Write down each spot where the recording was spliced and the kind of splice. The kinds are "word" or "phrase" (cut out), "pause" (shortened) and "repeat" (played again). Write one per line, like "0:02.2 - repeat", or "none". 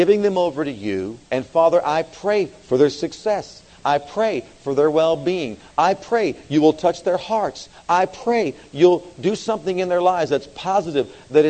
0:01.3 - pause